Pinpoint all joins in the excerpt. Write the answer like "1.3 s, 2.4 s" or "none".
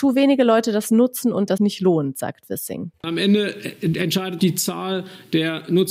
1.6 s, 2.9 s, 4.4 s